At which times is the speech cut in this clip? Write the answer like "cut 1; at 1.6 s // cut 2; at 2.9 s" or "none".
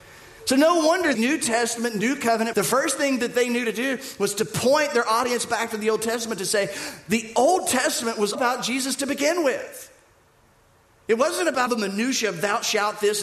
cut 1; at 1.1 s // cut 2; at 2.5 s // cut 3; at 8.3 s // cut 4; at 11.7 s

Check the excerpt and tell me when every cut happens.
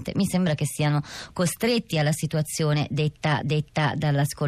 cut 1; at 3.4 s

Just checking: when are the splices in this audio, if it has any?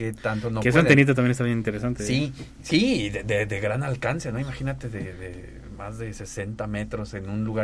none

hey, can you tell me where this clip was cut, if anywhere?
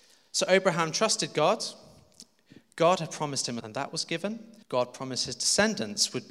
cut 1; at 3.6 s // cut 2; at 4.6 s

